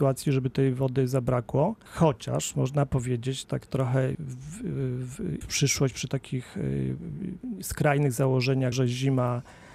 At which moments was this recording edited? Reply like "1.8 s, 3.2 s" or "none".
1.9 s, 3.4 s, 4.1 s, 5.4 s, 8.7 s

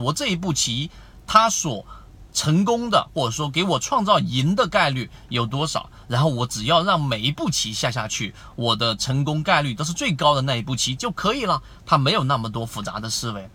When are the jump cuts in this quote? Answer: none

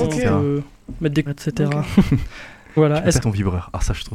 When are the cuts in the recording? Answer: 1.3 s, 2.8 s, 3.2 s

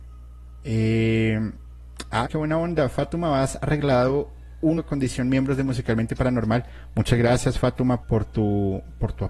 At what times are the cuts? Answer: 2.2 s, 4.8 s, 8.0 s

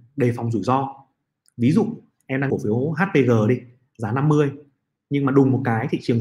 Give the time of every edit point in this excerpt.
2.5 s

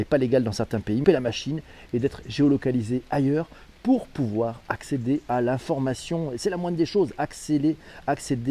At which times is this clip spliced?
1.0 s

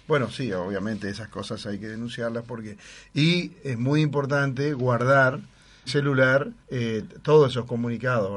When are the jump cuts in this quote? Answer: 5.9 s, 6.6 s

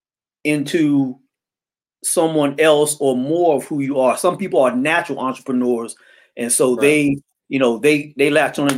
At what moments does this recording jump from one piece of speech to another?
none

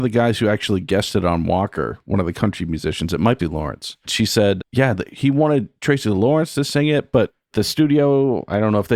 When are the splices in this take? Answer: 3.4 s, 4.6 s

